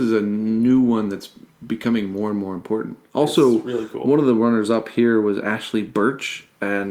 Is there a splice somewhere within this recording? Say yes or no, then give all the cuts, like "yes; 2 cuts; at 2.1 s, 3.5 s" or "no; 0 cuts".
no; 0 cuts